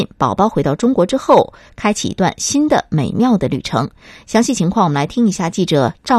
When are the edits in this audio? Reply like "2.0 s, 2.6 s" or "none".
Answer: none